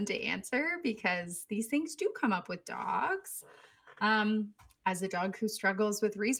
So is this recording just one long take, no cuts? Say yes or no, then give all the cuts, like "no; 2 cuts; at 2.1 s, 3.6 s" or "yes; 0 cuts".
yes; 0 cuts